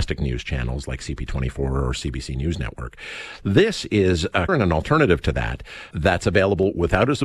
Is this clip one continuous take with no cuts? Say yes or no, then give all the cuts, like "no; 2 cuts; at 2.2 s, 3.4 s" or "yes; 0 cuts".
no; 2 cuts; at 4.5 s, 5.9 s